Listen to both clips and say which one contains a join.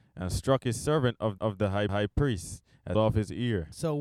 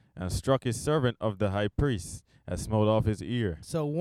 first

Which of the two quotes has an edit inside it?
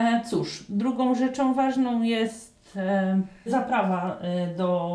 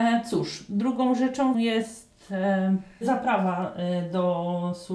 second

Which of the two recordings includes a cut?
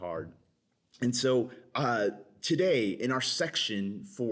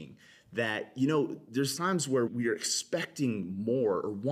second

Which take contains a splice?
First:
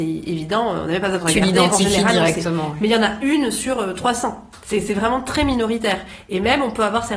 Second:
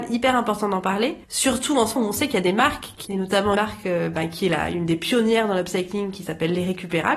second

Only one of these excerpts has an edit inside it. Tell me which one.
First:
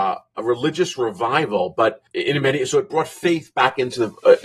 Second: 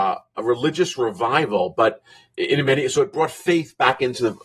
first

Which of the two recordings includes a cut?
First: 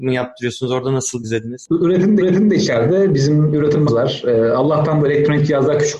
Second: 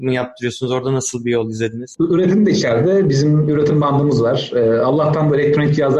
first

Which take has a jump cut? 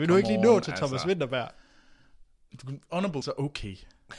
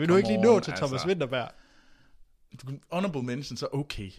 first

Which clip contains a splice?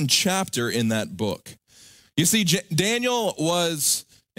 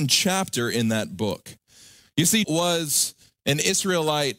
second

